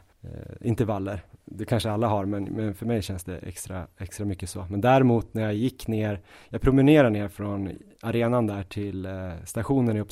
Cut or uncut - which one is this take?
uncut